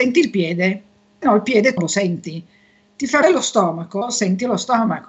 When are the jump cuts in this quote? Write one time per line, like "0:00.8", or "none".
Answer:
0:01.2
0:01.8
0:03.2